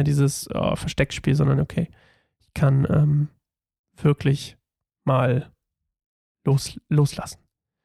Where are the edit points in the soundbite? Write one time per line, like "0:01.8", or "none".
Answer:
none

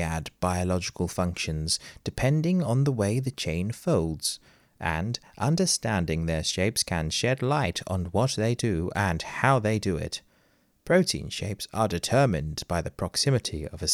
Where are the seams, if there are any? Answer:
none

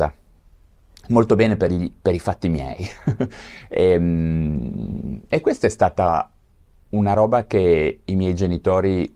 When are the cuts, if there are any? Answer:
none

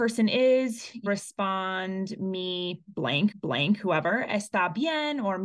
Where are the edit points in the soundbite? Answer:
0:01.1
0:03.3

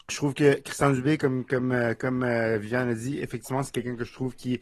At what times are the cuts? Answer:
none

